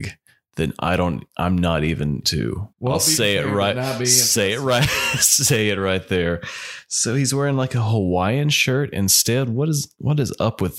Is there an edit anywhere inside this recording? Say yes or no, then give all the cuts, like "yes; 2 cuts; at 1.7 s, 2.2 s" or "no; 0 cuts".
yes; 2 cuts; at 2.2 s, 2.7 s